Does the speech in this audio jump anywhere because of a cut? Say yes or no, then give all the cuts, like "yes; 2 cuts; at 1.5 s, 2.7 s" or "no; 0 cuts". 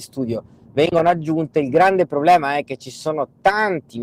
no; 0 cuts